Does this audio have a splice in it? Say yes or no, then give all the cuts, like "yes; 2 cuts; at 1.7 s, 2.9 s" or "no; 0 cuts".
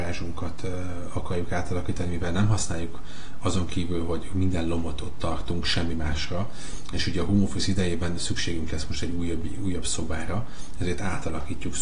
no; 0 cuts